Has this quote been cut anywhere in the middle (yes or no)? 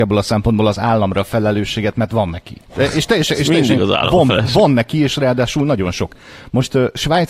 yes